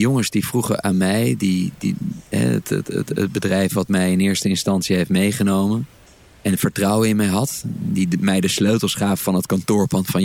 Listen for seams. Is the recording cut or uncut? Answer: cut